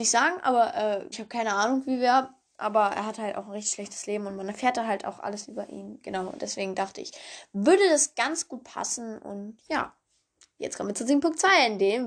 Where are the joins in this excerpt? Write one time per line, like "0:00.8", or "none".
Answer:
0:01.1